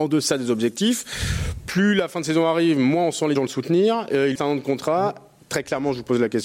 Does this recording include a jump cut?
yes; 2 cuts; at 3.4 s, 4.4 s

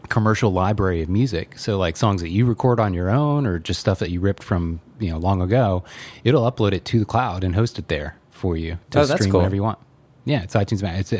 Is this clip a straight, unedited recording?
yes; 0 cuts

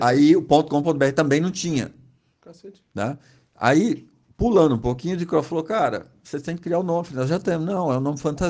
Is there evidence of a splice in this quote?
no; 0 cuts

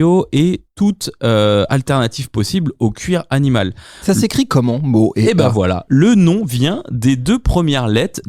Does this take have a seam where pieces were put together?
no; 0 cuts

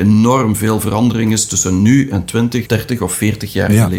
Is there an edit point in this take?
yes; 1 cut; at 2.6 s

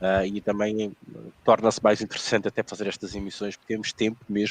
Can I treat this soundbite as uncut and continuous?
no; 1 cut; at 1.4 s

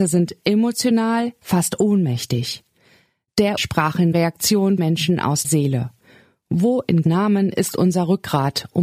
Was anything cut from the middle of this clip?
yes; 6 cuts; at 1.4 s, 3.6 s, 4.1 s, 4.8 s, 5.4 s, 7.0 s

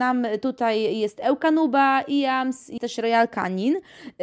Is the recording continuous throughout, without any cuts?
no; 1 cut; at 2.8 s

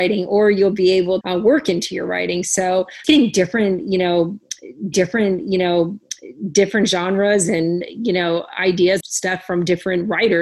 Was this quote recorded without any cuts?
no; 4 cuts; at 1.2 s, 3.0 s, 4.9 s, 9.0 s

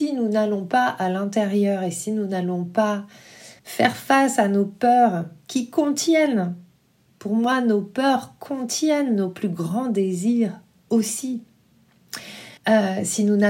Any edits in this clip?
yes; 2 cuts; at 3.6 s, 12.6 s

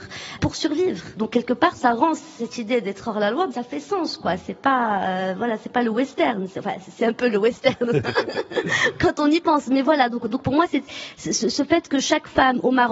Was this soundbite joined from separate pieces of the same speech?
no; 0 cuts

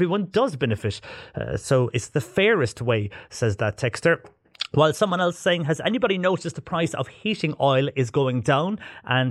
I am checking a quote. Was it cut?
no; 0 cuts

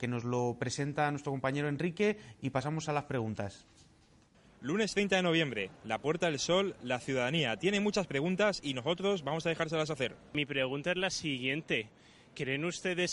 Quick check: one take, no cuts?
yes; 0 cuts

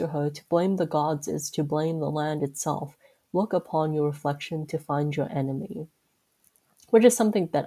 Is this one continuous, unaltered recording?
yes; 0 cuts

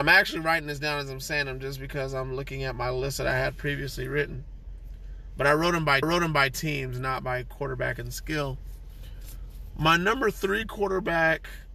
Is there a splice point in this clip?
yes; 1 cut; at 6.0 s

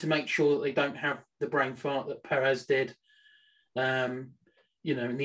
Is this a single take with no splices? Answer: yes; 0 cuts

